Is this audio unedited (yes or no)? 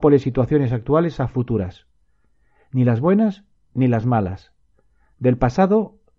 yes